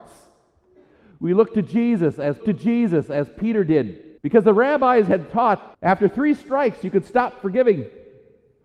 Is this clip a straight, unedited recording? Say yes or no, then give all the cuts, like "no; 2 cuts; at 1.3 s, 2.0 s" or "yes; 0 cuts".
no; 3 cuts; at 2.4 s, 4.2 s, 5.7 s